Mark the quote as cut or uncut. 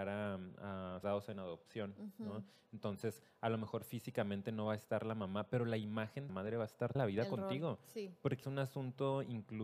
cut